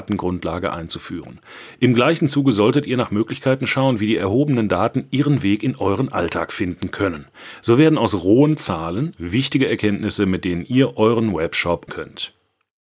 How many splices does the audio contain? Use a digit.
1